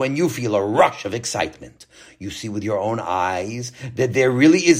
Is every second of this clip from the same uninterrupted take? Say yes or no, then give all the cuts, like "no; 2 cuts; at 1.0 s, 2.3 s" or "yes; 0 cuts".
yes; 0 cuts